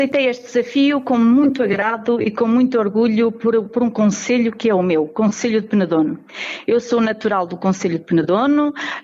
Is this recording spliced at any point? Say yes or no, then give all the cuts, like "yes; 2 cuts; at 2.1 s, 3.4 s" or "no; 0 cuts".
no; 0 cuts